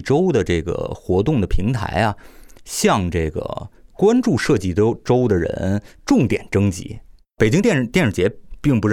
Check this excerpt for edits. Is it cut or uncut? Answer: uncut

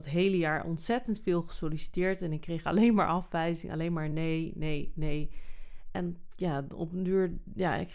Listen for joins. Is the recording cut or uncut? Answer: uncut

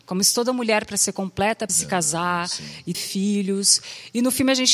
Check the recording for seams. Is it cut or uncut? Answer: cut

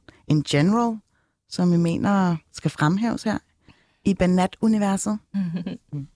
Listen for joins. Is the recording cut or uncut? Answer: uncut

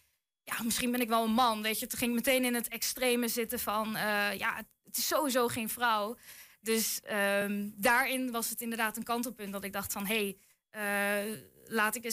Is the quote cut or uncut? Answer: uncut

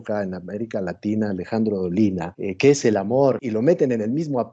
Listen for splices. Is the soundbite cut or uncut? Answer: uncut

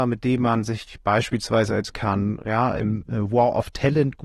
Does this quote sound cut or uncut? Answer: cut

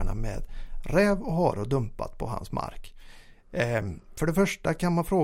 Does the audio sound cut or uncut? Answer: uncut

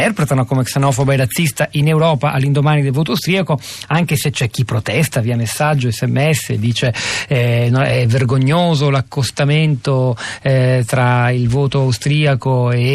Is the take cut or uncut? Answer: uncut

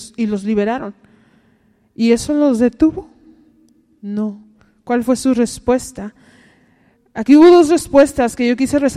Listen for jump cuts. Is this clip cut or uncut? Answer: uncut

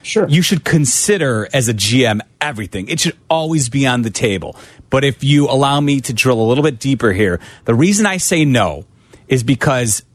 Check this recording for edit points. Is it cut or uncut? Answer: uncut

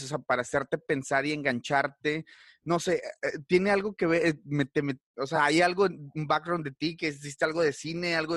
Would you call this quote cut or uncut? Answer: uncut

